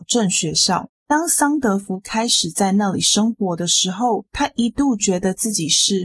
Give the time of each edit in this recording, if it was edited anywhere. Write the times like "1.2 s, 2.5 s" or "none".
0.9 s